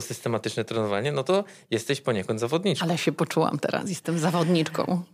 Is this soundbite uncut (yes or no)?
yes